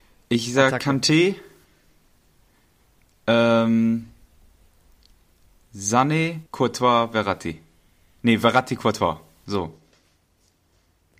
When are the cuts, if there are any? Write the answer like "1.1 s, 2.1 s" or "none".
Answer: 6.5 s